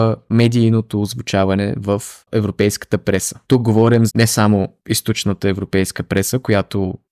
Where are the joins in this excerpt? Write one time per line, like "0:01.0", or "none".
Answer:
0:02.2
0:03.4
0:04.1